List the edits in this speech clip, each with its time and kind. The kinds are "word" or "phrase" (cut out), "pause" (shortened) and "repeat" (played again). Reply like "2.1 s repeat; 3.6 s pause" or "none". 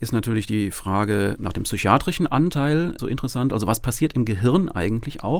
3.0 s word